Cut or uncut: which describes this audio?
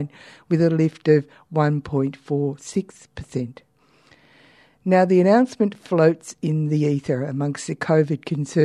uncut